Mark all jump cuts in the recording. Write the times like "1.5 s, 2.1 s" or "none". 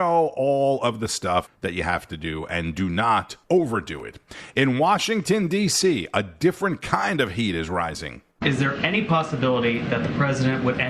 3.4 s